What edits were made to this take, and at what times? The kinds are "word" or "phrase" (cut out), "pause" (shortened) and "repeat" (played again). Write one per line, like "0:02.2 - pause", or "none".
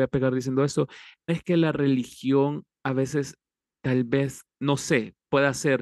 0:01.3 - word